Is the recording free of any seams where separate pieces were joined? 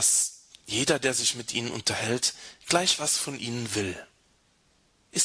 yes; 0 cuts

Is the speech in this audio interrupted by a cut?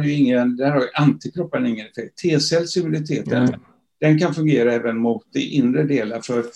no; 0 cuts

